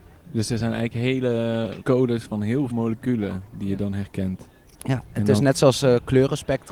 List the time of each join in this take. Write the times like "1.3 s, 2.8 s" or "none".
1.8 s, 2.7 s, 4.7 s